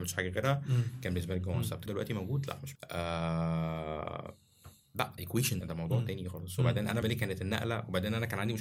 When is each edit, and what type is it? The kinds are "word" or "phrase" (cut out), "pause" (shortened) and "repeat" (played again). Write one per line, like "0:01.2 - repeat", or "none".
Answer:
0:01.9 - word
0:02.8 - word
0:05.2 - phrase
0:05.6 - word
0:07.0 - word